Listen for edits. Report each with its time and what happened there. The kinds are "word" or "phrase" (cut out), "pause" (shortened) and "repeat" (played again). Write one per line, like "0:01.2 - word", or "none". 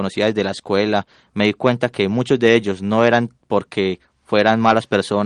none